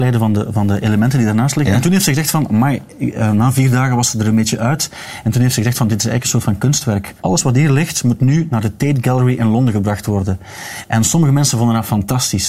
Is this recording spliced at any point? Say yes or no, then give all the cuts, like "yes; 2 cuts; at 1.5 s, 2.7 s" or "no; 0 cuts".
yes; 1 cut; at 7.2 s